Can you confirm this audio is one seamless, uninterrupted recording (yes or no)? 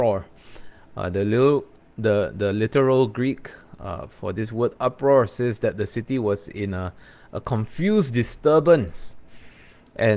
yes